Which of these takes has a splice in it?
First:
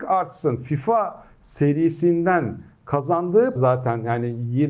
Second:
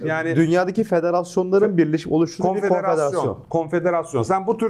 first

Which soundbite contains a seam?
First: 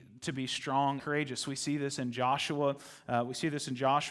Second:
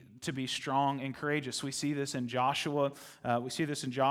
first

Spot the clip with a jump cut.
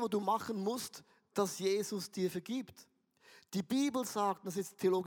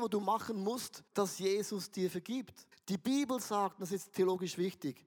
second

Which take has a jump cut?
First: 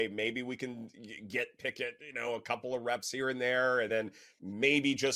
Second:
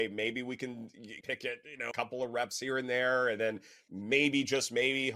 second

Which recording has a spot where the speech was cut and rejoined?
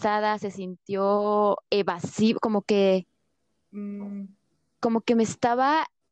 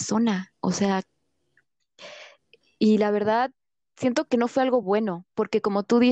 first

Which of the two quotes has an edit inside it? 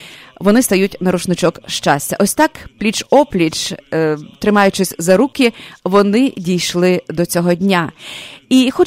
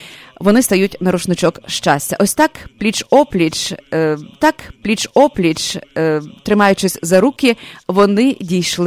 second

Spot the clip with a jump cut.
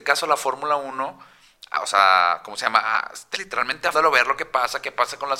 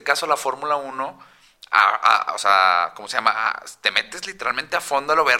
first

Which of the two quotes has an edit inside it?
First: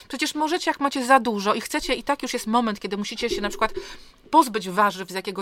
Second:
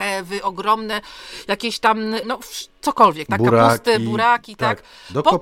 second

